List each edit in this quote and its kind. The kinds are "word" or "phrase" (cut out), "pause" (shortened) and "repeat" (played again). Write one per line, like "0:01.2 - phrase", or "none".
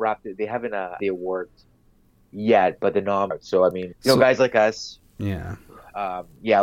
0:01.0 - word
0:03.3 - word
0:03.9 - word